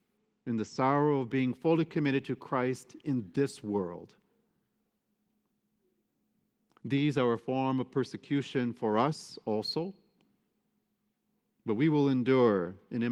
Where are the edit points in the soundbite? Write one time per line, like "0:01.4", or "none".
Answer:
none